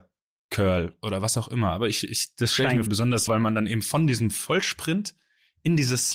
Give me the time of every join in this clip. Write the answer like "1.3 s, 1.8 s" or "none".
2.9 s, 3.3 s